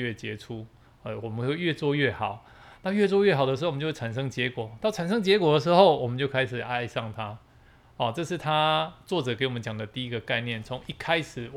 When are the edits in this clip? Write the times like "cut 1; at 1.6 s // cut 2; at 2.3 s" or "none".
none